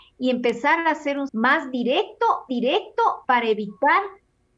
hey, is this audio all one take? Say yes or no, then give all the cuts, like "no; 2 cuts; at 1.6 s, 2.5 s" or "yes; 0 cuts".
no; 2 cuts; at 1.3 s, 2.5 s